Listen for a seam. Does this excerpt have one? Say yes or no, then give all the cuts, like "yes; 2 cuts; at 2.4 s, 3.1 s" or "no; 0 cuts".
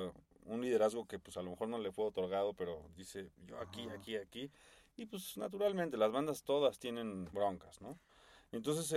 no; 0 cuts